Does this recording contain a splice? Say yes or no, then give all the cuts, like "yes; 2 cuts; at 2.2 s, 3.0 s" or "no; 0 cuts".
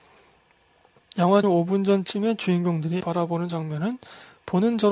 yes; 2 cuts; at 1.4 s, 3.0 s